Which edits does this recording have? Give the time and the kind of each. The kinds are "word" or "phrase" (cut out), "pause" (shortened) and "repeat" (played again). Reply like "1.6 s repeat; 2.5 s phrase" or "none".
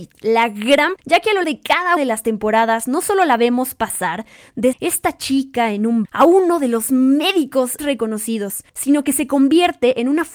1.0 s word; 1.4 s word; 2.0 s word; 4.7 s word; 6.0 s word; 7.8 s word